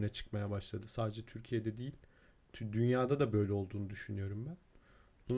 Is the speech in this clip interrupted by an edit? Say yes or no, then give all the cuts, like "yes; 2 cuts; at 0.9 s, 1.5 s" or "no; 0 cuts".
no; 0 cuts